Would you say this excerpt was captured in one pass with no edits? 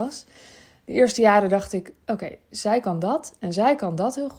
yes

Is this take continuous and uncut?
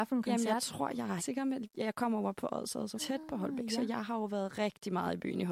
no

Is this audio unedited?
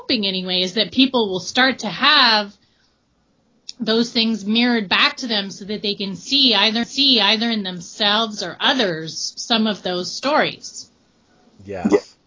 no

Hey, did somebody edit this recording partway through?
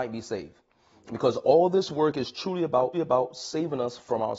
yes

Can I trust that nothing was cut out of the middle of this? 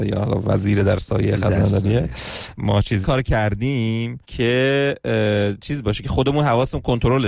no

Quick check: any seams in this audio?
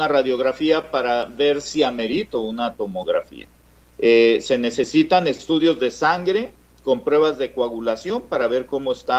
no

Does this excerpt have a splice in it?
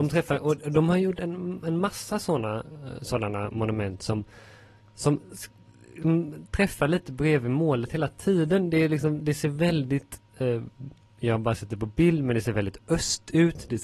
no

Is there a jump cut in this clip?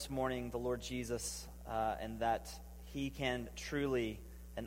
no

